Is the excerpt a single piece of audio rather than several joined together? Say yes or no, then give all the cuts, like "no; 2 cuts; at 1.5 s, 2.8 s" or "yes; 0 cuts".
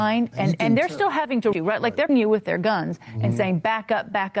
no; 2 cuts; at 1.5 s, 2.1 s